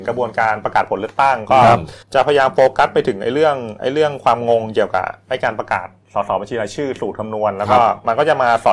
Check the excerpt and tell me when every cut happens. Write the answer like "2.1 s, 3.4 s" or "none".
2.0 s

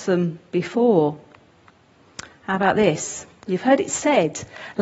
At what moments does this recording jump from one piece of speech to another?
none

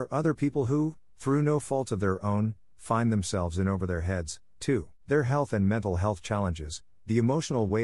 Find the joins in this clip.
5.0 s

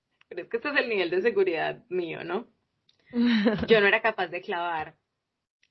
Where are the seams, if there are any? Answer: none

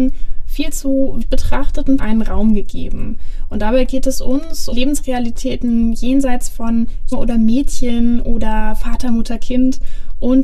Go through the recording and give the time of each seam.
1.2 s, 2.0 s, 4.7 s, 7.1 s

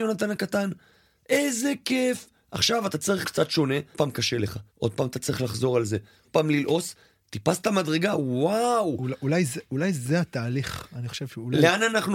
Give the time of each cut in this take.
3.2 s, 3.9 s, 4.7 s, 6.2 s

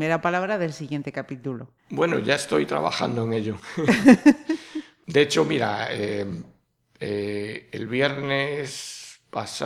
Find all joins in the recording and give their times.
1.8 s

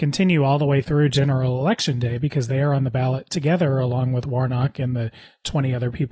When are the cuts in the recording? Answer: none

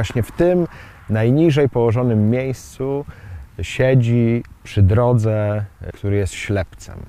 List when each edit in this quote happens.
4.5 s, 5.9 s

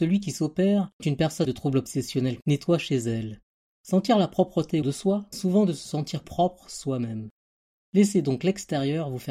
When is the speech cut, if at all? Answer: 1.0 s, 1.4 s, 2.4 s, 4.8 s, 5.3 s, 6.2 s

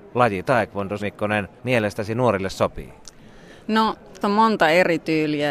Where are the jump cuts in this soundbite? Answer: 1.0 s, 1.6 s, 4.2 s

